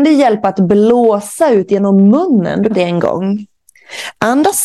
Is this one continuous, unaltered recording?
no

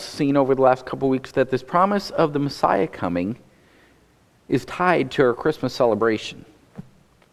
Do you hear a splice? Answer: no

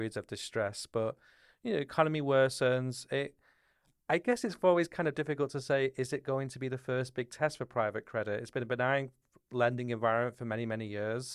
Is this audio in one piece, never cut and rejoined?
yes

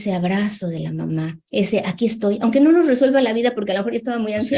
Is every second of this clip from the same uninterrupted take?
yes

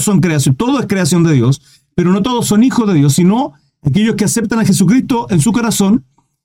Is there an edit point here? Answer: no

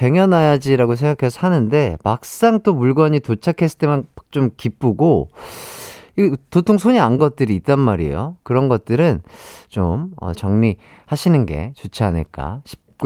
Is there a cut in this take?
yes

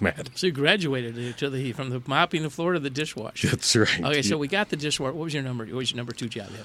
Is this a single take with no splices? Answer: yes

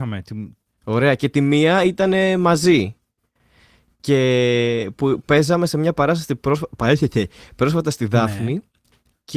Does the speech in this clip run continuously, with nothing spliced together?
yes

